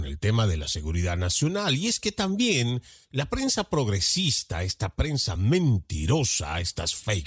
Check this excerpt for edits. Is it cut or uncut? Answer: uncut